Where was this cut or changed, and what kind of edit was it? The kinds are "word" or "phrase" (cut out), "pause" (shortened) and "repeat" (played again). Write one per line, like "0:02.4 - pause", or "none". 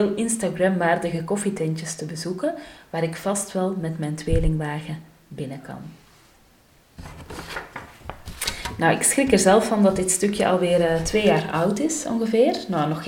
none